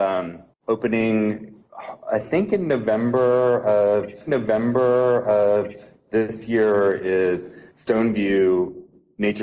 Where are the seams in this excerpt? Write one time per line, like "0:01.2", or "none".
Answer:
0:04.3
0:07.7